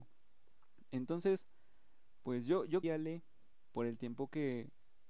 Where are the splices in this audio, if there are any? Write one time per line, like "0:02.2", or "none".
0:02.8

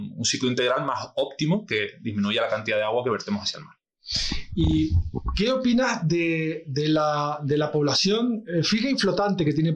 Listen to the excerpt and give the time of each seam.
none

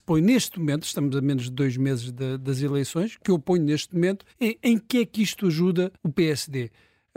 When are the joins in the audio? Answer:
0:04.3
0:05.9

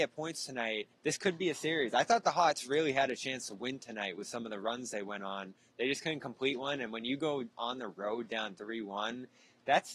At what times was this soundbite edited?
0:00.9

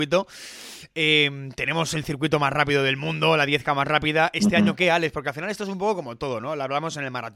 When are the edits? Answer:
none

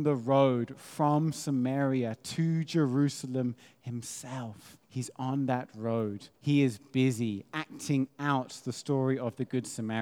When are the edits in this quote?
0:04.8
0:06.4

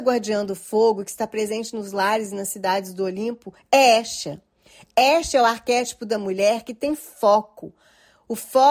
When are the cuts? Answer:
none

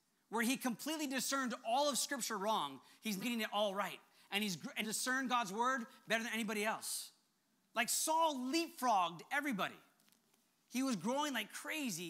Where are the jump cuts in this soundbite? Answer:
0:03.2
0:04.8

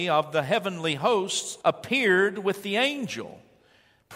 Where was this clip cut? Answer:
0:01.6

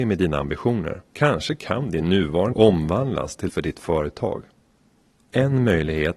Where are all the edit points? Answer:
0:01.1
0:02.5
0:03.5

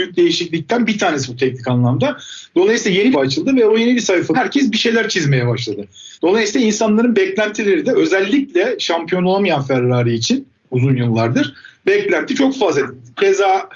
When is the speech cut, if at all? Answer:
0:03.1
0:04.3
0:06.1

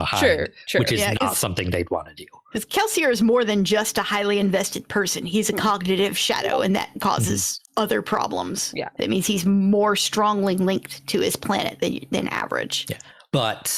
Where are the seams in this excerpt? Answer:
none

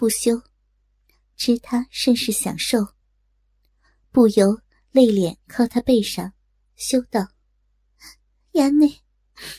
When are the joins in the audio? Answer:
none

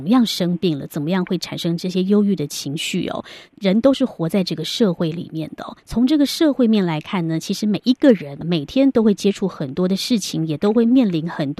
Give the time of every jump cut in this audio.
0:05.8

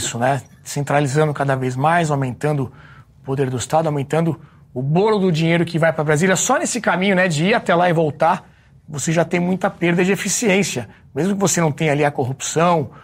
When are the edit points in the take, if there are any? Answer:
none

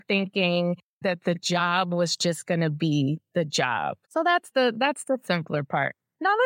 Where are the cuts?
0:04.0

